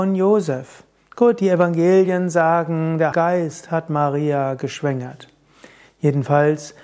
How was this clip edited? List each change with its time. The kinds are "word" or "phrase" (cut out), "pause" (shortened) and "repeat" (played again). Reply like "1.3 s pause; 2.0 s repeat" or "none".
3.1 s word